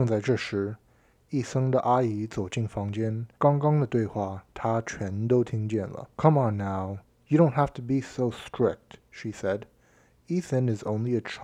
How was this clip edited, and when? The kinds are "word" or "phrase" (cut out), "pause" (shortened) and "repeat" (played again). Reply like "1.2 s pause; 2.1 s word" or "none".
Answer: 3.4 s pause; 6.1 s pause